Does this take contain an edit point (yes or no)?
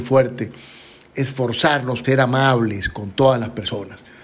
yes